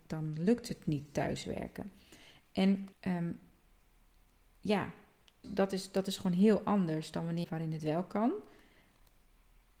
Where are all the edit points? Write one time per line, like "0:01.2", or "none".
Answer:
0:02.9
0:05.4
0:07.4